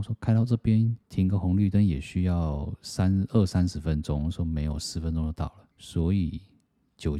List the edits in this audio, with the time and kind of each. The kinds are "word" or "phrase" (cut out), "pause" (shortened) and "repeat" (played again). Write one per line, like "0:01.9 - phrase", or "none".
0:01.0 - pause
0:05.7 - pause